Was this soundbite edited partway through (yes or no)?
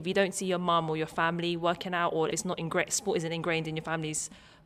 yes